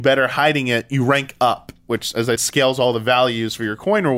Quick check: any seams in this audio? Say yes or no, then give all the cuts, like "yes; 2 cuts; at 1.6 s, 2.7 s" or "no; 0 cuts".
yes; 1 cut; at 2.4 s